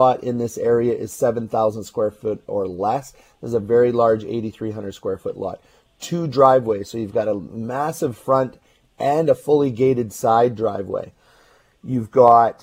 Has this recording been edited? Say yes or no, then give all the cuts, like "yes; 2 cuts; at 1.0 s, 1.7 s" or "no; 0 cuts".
no; 0 cuts